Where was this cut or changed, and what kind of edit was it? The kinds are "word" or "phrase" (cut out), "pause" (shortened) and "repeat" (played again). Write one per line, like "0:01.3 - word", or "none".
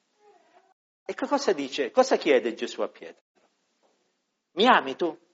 none